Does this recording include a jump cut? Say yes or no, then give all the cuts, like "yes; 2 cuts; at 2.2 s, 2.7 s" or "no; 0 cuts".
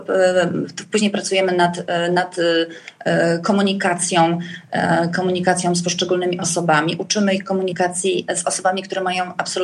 no; 0 cuts